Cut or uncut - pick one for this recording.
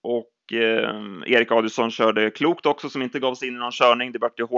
uncut